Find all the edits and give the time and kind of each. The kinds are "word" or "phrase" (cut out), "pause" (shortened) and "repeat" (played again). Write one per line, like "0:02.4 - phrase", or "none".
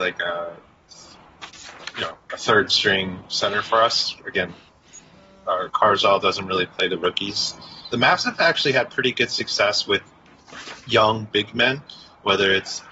0:05.7 - word
0:07.9 - phrase
0:10.8 - pause